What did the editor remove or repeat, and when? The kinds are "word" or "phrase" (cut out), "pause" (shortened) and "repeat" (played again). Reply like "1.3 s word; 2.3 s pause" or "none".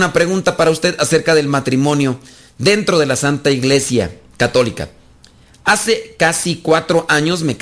none